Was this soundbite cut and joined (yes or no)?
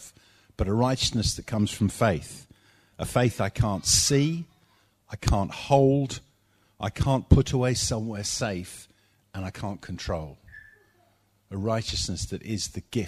no